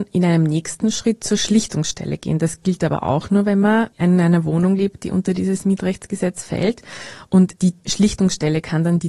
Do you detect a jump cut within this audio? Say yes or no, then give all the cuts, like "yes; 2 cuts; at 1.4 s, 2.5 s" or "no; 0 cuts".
no; 0 cuts